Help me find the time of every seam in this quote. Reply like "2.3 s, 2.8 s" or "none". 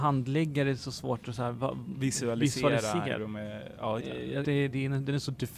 3.2 s, 4.0 s, 4.4 s

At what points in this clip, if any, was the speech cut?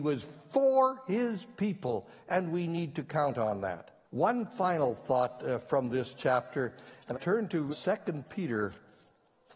4.0 s, 7.1 s, 7.7 s

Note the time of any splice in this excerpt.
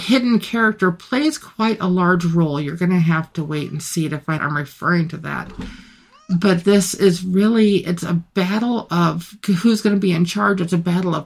4.4 s

